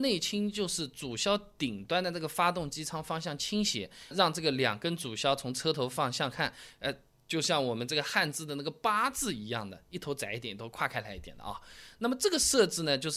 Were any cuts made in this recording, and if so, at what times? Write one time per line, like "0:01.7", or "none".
0:04.1